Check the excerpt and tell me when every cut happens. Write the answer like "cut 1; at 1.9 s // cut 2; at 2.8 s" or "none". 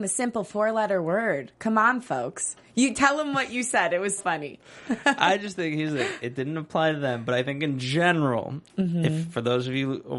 cut 1; at 4.2 s

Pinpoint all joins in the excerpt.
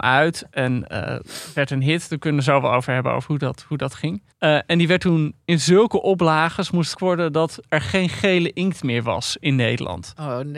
cut 1; at 4.3 s // cut 2; at 6.9 s

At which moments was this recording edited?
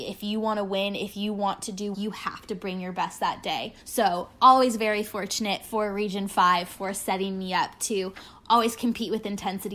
cut 1; at 1.9 s // cut 2; at 3.8 s

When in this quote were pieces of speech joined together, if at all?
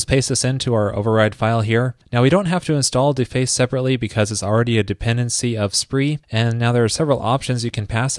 cut 1; at 2.0 s // cut 2; at 6.2 s

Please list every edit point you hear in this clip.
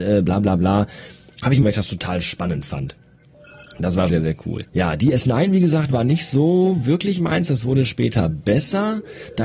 cut 1; at 1.6 s // cut 2; at 4.1 s // cut 3; at 4.7 s

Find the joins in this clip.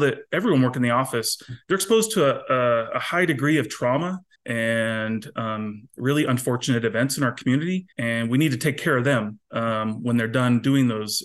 cut 1; at 4.3 s // cut 2; at 7.9 s // cut 3; at 9.4 s

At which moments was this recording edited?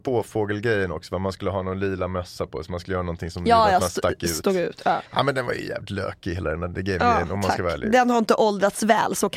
cut 1; at 5.0 s

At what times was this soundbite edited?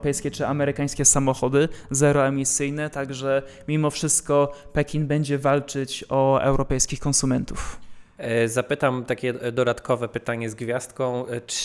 none

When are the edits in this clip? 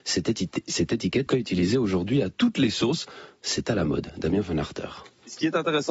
cut 1; at 1.3 s

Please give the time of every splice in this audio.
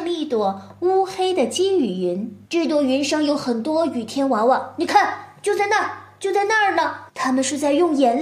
cut 1; at 2.4 s // cut 2; at 7.1 s

